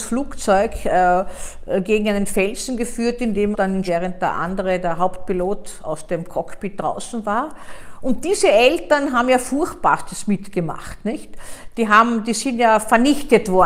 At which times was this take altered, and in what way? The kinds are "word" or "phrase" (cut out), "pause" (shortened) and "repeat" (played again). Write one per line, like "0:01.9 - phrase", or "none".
0:03.5 - phrase
0:03.9 - phrase